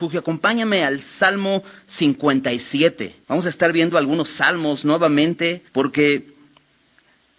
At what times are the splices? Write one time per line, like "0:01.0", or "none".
0:03.2
0:05.7

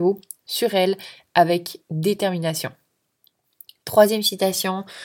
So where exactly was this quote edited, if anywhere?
none

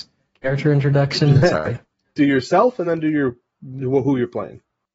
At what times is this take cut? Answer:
none

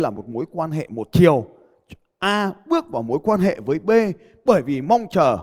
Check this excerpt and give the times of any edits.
none

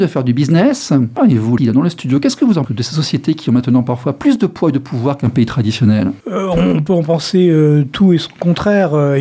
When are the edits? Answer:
0:01.6
0:02.6

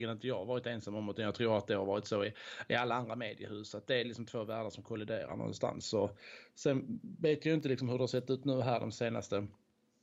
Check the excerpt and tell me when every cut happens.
0:04.0

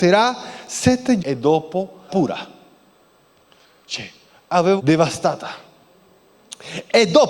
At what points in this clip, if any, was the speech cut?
0:01.2
0:02.1
0:04.8

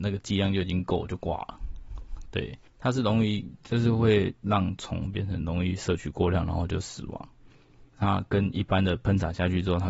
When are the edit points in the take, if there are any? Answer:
0:02.7
0:07.9

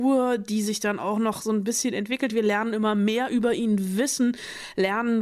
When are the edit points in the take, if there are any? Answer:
none

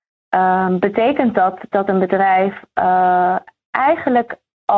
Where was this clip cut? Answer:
none

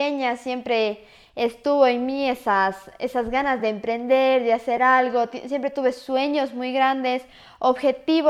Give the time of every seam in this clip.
none

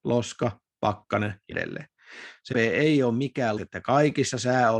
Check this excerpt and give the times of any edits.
0:01.5
0:02.5
0:03.6

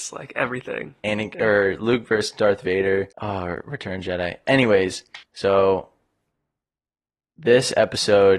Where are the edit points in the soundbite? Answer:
0:03.1
0:05.2

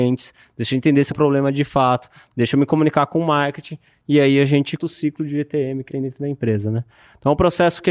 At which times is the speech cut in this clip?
0:01.1
0:04.8
0:05.9

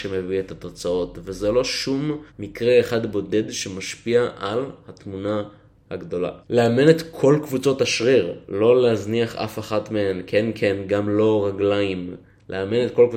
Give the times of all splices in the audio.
0:02.3
0:06.4

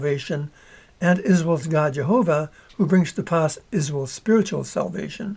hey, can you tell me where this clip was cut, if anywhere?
none

